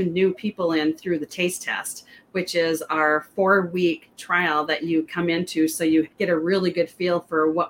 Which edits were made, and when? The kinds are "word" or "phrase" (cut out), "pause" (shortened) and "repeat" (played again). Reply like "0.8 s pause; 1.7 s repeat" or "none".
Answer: 5.1 s word; 6.1 s pause